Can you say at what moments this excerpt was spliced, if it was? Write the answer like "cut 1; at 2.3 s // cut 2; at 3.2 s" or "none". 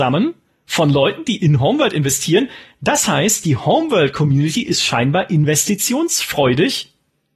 none